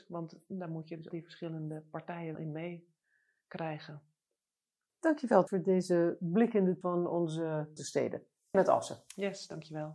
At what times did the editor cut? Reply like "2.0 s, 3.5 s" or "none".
1.1 s, 2.3 s, 5.5 s, 6.8 s, 7.8 s, 8.5 s